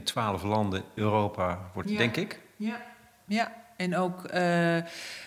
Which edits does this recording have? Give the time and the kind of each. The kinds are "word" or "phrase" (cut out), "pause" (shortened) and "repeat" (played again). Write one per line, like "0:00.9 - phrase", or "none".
0:01.0 - word
0:01.8 - word